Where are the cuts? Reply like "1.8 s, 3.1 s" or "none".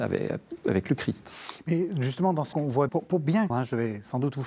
2.5 s, 2.9 s, 3.5 s